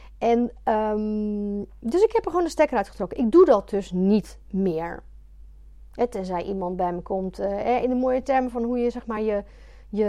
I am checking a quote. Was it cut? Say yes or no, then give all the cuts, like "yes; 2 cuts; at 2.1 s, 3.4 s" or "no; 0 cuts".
no; 0 cuts